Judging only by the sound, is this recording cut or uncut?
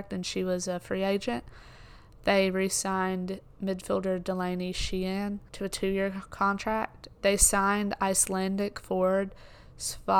cut